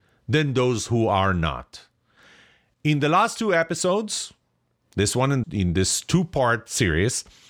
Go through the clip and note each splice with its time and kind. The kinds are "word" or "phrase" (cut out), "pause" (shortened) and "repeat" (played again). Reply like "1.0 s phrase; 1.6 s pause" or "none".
5.4 s phrase